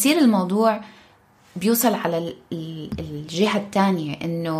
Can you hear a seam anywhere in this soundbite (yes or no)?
no